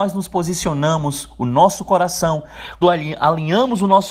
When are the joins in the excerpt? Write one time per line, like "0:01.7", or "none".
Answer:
0:02.8